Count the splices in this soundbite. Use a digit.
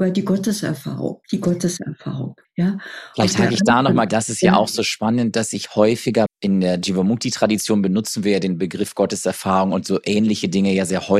4